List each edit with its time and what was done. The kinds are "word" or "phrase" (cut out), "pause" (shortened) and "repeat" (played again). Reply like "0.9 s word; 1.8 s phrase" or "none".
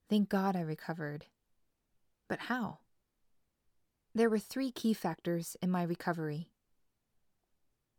none